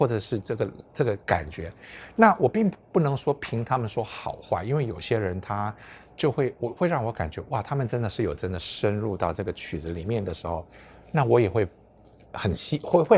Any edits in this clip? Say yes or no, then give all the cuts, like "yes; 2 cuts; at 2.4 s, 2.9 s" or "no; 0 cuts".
yes; 1 cut; at 1.2 s